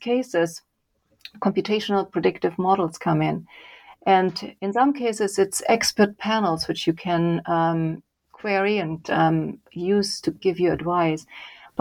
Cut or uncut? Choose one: uncut